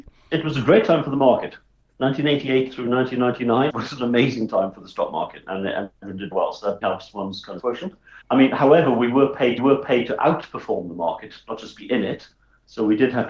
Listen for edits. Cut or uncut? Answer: cut